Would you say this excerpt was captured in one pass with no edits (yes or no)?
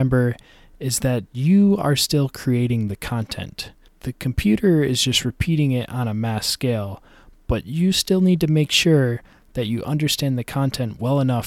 yes